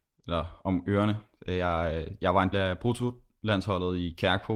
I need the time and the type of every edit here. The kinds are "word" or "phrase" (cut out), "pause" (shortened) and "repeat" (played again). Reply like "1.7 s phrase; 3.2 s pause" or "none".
2.5 s word